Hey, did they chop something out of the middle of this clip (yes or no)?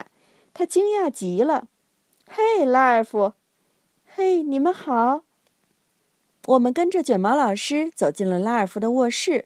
no